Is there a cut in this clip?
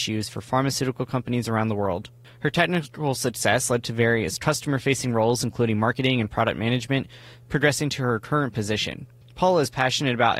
no; 0 cuts

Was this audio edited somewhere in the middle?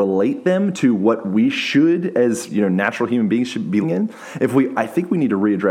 yes; 2 cuts; at 3.8 s, 4.7 s

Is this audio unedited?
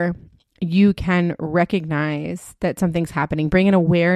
yes; 0 cuts

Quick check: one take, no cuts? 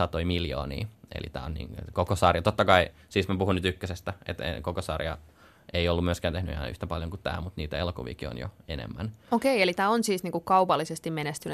yes; 0 cuts

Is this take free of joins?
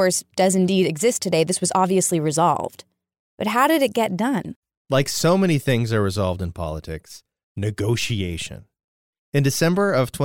yes; 0 cuts

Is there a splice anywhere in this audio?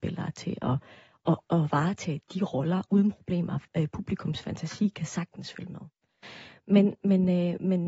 no; 0 cuts

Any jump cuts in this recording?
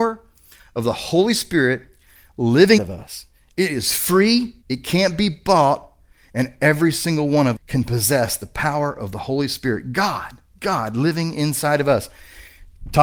yes; 4 cuts; at 2.8 s, 4.6 s, 7.6 s, 10.5 s

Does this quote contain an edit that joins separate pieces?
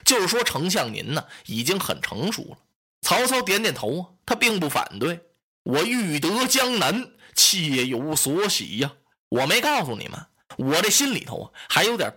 no; 0 cuts

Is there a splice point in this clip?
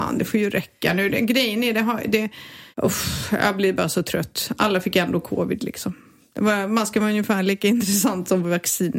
yes; 1 cut; at 2.7 s

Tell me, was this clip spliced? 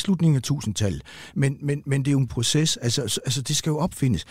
yes; 1 cut; at 2.3 s

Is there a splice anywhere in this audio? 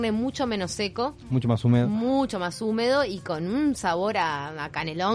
no; 0 cuts

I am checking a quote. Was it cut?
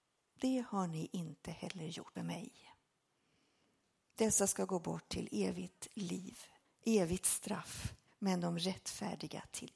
yes; 3 cuts; at 2.1 s, 6.6 s, 8.1 s

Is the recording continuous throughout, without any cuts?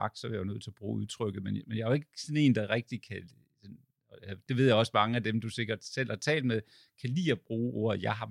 yes; 0 cuts

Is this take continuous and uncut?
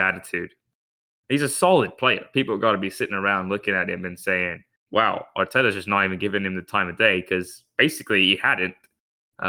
no; 1 cut; at 4.8 s

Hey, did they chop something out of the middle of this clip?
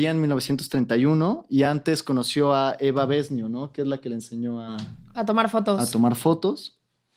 no; 0 cuts

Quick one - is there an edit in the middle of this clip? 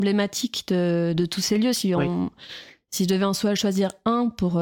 no; 0 cuts

